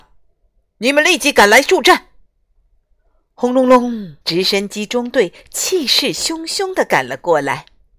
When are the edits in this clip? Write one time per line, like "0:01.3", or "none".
0:02.3
0:04.2